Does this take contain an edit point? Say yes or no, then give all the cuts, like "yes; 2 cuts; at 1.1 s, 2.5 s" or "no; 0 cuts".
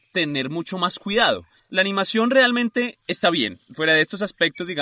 yes; 2 cuts; at 1.6 s, 3.0 s